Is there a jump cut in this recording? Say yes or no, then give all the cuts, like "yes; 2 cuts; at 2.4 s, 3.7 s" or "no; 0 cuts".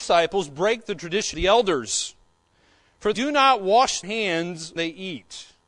yes; 4 cuts; at 1.3 s, 3.1 s, 4.0 s, 4.8 s